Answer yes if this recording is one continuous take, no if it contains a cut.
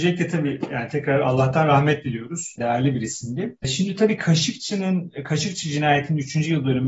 yes